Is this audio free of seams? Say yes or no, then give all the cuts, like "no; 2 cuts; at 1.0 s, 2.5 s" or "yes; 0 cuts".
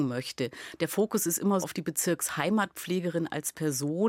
no; 1 cut; at 1.6 s